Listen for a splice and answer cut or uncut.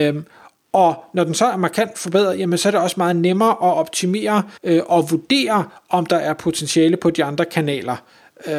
cut